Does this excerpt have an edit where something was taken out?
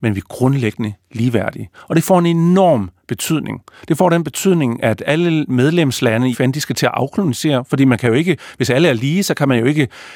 yes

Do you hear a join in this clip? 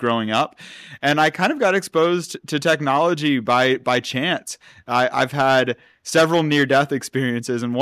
no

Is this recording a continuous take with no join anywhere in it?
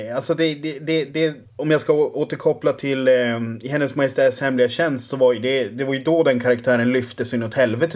no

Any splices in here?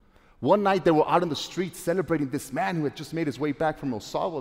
no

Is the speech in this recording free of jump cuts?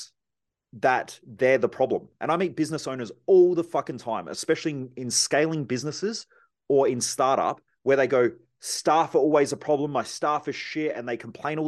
yes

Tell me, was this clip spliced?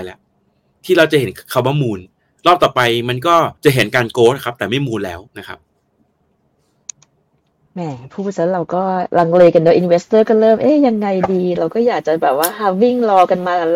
yes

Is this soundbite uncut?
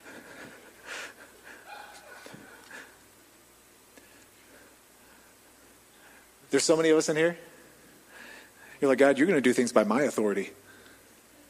no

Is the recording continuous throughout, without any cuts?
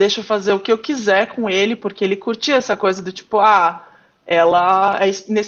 yes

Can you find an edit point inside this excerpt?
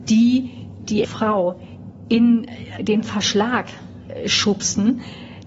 yes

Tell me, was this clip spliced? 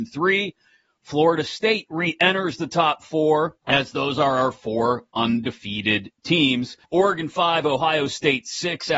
yes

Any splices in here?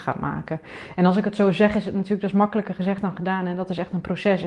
no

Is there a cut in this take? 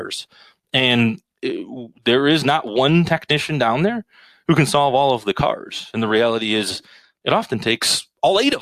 no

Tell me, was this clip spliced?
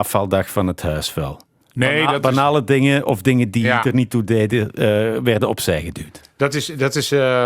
no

